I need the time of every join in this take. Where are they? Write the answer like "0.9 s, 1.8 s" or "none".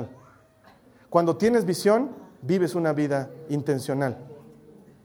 none

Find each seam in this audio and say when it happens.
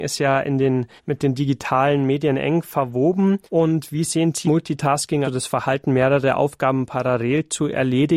1.0 s, 3.5 s, 4.4 s, 5.2 s

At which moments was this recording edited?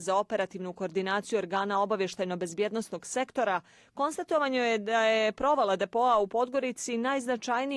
none

